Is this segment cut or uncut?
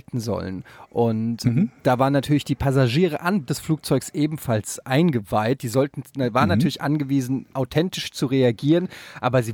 cut